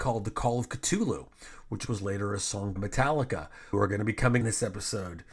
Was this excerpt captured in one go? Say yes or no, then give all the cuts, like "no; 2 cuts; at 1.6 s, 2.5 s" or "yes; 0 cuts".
no; 4 cuts; at 1.9 s, 2.8 s, 3.7 s, 4.4 s